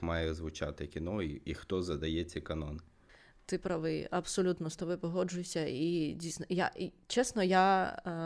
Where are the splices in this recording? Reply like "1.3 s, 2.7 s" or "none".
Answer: none